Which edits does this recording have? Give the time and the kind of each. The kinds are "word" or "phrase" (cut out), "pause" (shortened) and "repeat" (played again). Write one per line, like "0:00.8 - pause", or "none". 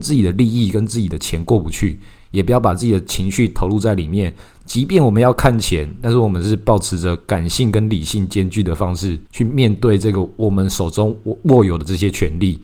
0:09.3 - pause